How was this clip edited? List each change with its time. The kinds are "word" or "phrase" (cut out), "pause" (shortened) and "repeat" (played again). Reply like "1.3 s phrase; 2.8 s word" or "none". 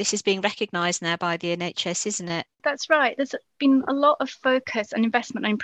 none